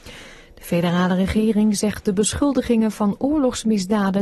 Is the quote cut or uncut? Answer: uncut